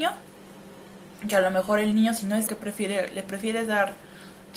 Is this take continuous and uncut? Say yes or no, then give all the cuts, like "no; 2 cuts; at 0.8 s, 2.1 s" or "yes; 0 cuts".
no; 1 cut; at 2.5 s